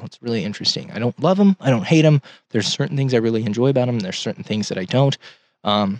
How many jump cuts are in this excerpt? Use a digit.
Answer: 0